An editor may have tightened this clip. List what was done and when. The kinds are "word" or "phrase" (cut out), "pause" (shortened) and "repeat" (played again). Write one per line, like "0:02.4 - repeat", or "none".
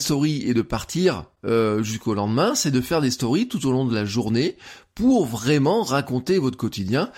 none